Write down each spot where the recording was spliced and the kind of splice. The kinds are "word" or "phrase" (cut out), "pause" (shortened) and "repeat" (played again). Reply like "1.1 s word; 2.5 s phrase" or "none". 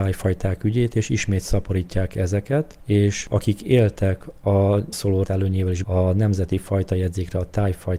4.9 s phrase; 5.2 s word; 5.8 s word